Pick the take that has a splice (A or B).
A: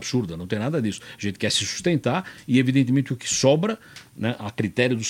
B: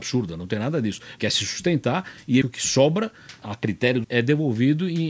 B